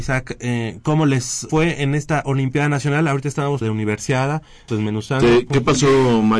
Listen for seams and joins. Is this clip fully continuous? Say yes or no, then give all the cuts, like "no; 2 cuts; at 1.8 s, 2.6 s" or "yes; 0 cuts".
no; 3 cuts; at 1.5 s, 3.6 s, 4.7 s